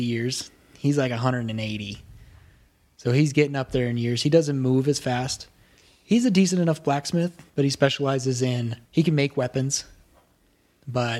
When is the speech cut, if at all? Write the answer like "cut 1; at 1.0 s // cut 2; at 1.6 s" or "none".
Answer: cut 1; at 7.5 s // cut 2; at 8.9 s